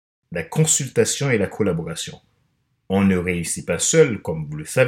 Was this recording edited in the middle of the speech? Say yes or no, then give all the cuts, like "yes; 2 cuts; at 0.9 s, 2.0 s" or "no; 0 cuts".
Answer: no; 0 cuts